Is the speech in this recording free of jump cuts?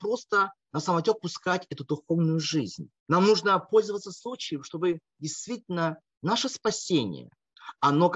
no; 1 cut; at 3.0 s

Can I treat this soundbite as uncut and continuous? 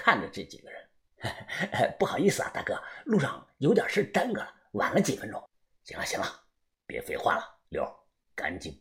no; 3 cuts; at 1.1 s, 5.5 s, 7.7 s

